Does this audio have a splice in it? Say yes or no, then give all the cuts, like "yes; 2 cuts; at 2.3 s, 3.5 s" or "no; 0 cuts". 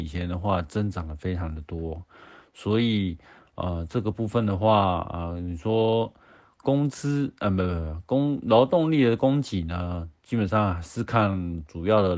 no; 0 cuts